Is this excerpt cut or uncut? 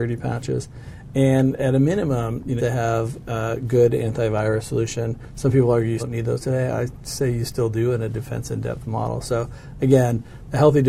cut